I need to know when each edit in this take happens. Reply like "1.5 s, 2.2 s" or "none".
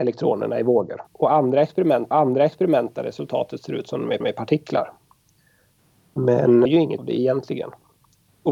1.1 s, 2.1 s, 4.2 s, 6.7 s, 7.0 s